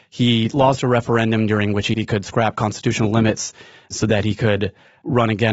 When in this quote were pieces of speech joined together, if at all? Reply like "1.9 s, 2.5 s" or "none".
1.9 s